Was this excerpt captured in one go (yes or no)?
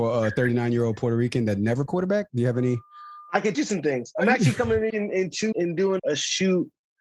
no